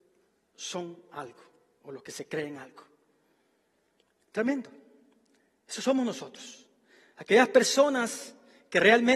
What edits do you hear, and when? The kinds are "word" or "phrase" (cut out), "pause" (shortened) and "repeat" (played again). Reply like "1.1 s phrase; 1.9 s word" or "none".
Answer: none